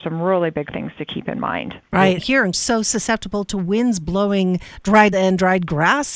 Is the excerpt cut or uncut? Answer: cut